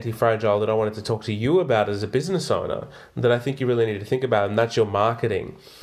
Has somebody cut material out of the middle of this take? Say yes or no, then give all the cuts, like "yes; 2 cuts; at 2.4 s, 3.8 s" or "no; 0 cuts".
no; 0 cuts